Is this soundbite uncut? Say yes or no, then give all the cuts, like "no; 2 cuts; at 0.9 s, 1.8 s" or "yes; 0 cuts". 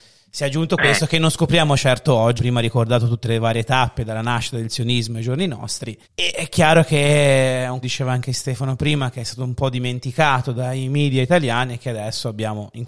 no; 3 cuts; at 2.4 s, 6.0 s, 7.8 s